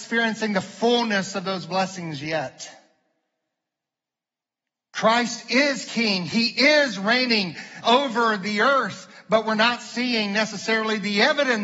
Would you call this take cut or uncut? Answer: cut